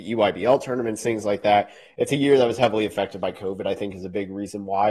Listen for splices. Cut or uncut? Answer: uncut